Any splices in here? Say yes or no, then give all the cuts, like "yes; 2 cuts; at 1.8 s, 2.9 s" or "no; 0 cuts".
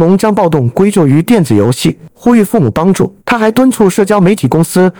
yes; 2 cuts; at 2.1 s, 3.2 s